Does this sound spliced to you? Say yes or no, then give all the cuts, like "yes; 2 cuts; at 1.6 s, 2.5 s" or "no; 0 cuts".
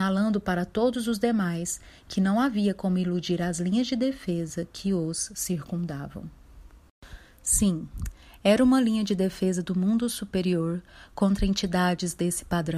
no; 0 cuts